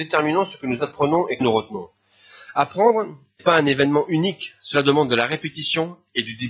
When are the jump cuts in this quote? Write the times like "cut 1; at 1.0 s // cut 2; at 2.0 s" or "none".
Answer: cut 1; at 1.4 s // cut 2; at 3.4 s

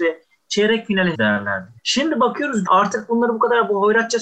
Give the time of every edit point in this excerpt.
cut 1; at 1.1 s // cut 2; at 1.8 s // cut 3; at 2.7 s

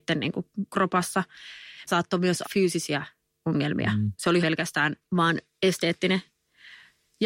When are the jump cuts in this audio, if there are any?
cut 1; at 1.9 s // cut 2; at 2.4 s // cut 3; at 4.4 s

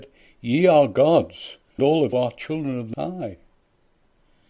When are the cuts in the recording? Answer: cut 1; at 1.8 s // cut 2; at 2.1 s // cut 3; at 2.9 s

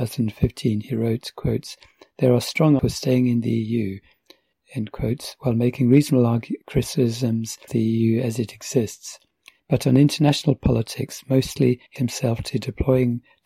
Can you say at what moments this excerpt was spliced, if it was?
cut 1; at 2.8 s // cut 2; at 7.7 s // cut 3; at 12.0 s

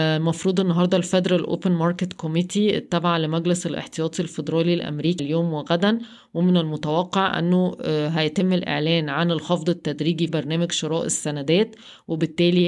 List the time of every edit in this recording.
cut 1; at 5.2 s // cut 2; at 10.3 s

